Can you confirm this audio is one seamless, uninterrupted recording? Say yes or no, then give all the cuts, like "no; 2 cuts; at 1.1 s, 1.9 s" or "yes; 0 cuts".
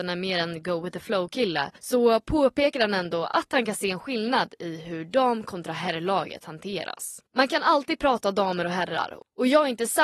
no; 2 cuts; at 1.8 s, 7.3 s